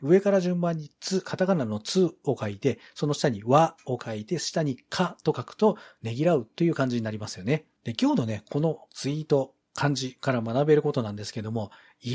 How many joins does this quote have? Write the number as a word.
one